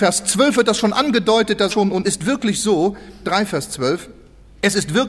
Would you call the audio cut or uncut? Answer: cut